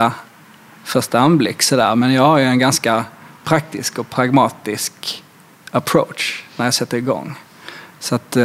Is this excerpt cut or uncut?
uncut